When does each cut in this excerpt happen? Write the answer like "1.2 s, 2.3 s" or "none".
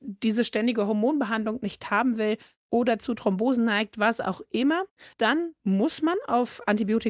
5.1 s